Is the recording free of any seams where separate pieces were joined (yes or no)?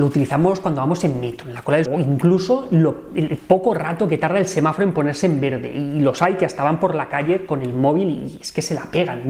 no